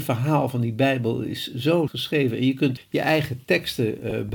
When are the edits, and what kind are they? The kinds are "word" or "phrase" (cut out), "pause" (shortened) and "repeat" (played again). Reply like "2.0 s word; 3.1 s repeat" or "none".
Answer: 1.9 s word; 2.8 s word